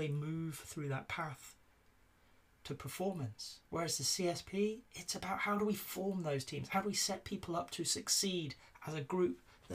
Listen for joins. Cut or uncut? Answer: uncut